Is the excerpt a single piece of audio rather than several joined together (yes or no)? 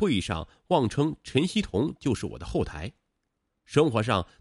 yes